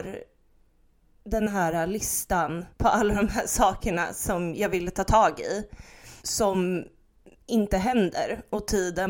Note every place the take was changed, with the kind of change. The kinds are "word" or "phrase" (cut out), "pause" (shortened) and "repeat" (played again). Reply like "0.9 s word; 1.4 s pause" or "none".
2.7 s pause; 6.2 s pause